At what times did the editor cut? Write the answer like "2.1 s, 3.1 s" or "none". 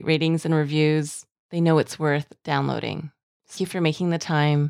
3.6 s